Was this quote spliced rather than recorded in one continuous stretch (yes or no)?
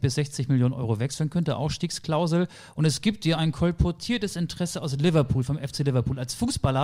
no